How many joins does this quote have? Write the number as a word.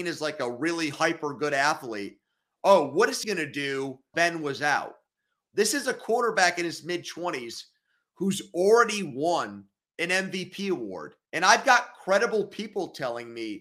three